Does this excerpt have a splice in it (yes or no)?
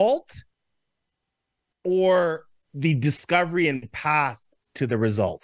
no